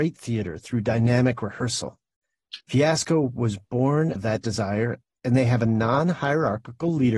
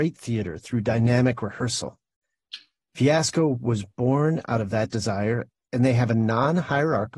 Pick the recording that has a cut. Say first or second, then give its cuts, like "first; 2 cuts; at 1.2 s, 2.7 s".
first; 2 cuts; at 2.6 s, 4.2 s